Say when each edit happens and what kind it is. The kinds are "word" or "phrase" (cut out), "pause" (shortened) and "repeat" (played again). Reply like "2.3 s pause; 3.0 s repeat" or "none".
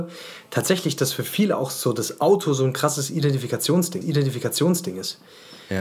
4.0 s repeat